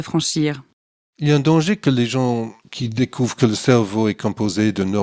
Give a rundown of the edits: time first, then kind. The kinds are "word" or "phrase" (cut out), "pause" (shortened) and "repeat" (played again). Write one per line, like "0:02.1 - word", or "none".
none